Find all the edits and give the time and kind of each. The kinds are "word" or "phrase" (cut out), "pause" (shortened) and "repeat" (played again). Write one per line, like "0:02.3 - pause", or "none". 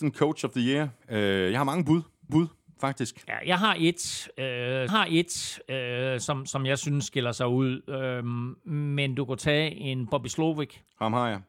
0:02.3 - repeat
0:04.9 - repeat